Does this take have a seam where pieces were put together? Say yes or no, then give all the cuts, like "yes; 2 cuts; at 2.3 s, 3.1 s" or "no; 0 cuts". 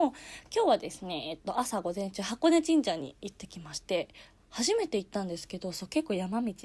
no; 0 cuts